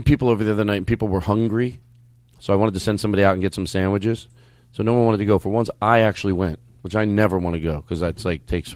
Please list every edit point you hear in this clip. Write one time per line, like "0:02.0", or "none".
none